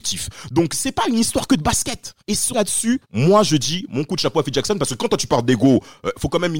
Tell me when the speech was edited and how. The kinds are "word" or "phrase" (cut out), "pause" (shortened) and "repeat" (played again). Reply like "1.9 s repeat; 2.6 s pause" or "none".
2.2 s pause; 2.5 s word; 3.0 s pause